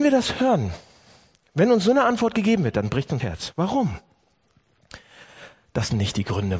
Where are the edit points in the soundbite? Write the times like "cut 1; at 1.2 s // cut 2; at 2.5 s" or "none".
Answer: cut 1; at 3.2 s